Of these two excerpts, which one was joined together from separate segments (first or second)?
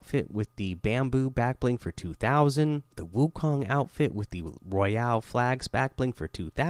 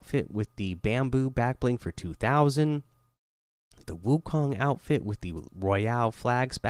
first